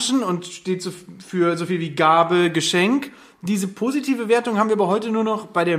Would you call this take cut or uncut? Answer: uncut